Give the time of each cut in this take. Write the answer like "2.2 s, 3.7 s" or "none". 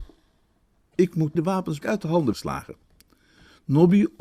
1.4 s, 1.8 s, 2.3 s